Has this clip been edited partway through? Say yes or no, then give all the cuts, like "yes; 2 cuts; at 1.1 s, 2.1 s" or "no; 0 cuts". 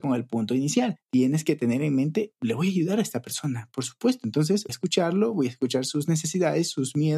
yes; 1 cut; at 4.7 s